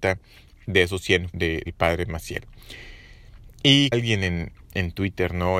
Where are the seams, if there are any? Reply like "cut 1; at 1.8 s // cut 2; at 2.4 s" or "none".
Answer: cut 1; at 1.3 s // cut 2; at 1.7 s // cut 3; at 3.9 s